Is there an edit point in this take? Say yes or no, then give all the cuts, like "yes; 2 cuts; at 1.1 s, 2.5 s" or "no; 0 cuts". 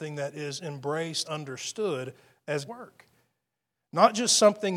yes; 2 cuts; at 1.2 s, 2.7 s